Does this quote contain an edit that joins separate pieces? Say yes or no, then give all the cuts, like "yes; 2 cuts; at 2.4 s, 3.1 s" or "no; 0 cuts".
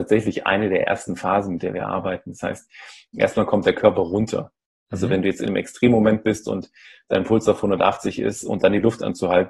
no; 0 cuts